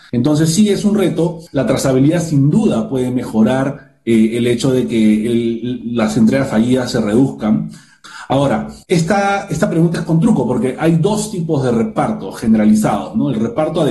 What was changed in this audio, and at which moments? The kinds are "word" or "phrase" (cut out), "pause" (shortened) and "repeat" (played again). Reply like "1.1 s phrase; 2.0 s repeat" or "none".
1.5 s pause; 8.8 s pause